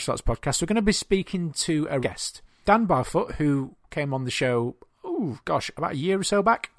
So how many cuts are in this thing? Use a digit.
2